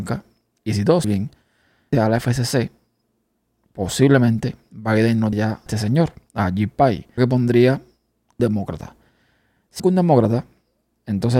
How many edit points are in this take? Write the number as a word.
seven